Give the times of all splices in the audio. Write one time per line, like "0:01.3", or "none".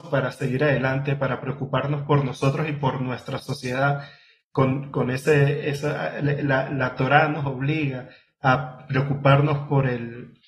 none